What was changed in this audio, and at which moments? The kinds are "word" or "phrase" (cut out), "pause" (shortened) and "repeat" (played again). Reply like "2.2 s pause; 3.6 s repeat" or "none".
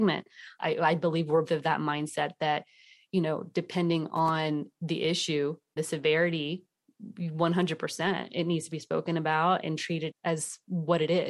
1.4 s word; 5.8 s word; 9.6 s word; 10.1 s word